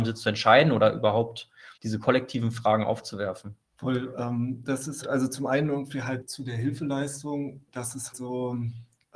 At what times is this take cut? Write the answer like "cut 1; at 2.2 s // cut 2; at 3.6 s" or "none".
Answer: cut 1; at 1.8 s // cut 2; at 3.7 s // cut 3; at 5.0 s // cut 4; at 6.2 s // cut 5; at 7.7 s // cut 6; at 8.1 s